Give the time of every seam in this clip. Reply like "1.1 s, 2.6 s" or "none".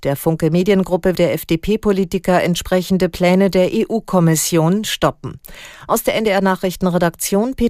1.1 s